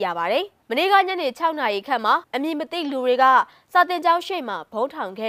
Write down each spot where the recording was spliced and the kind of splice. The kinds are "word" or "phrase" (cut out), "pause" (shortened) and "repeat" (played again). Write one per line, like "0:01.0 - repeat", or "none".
0:02.2 - pause